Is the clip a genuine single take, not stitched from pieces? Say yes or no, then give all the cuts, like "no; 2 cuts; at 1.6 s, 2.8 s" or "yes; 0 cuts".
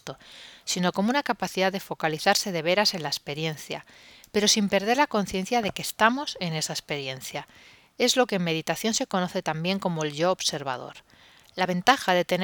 yes; 0 cuts